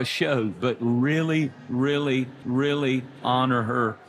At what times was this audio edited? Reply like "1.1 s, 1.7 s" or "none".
2.4 s

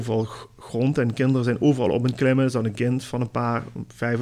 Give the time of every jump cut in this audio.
none

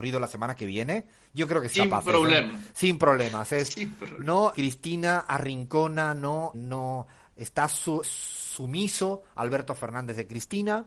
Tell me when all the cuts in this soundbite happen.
1.7 s, 4.5 s, 6.5 s, 8.0 s

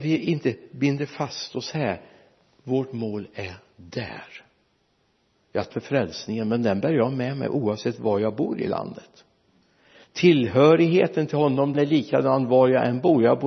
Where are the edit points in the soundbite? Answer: 5.7 s, 11.7 s

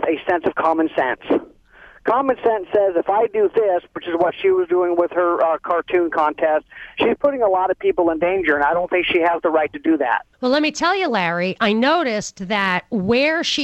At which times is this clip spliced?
10.3 s

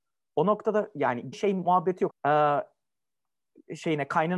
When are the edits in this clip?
1.3 s, 2.1 s

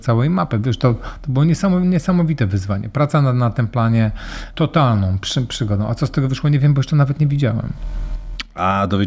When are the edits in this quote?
4.5 s

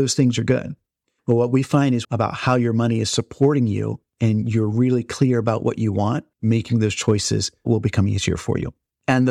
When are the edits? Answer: 2.0 s, 6.3 s

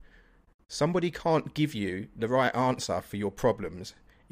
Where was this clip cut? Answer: none

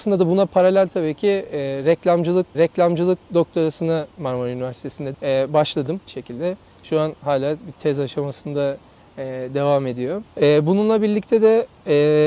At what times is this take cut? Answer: 2.5 s, 5.1 s, 6.1 s, 10.3 s

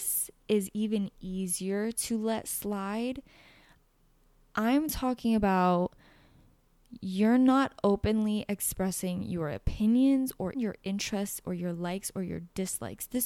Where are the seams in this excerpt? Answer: 10.5 s

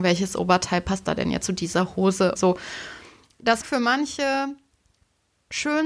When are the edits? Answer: 1.4 s, 2.4 s, 3.6 s

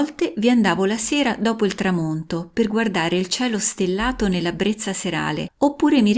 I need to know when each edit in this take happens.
none

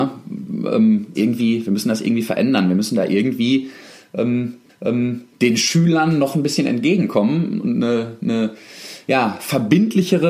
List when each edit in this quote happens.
1.1 s, 4.7 s

